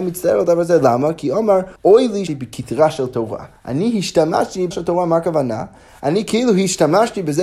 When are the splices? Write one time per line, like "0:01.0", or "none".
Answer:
0:01.8
0:02.3
0:03.6
0:04.7